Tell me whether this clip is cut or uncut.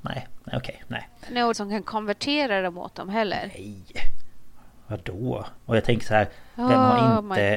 cut